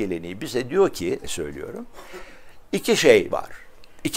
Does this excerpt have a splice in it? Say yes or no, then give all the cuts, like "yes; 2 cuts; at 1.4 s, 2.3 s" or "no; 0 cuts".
yes; 1 cut; at 1.2 s